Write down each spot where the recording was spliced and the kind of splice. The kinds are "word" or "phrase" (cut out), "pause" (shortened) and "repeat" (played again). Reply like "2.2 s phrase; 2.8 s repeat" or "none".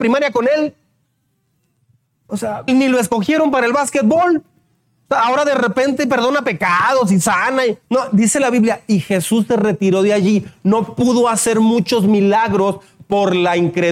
2.7 s word; 7.8 s pause